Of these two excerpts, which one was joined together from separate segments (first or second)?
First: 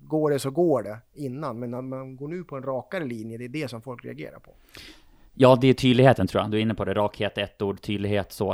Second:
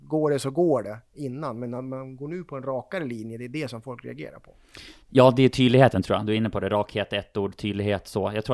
second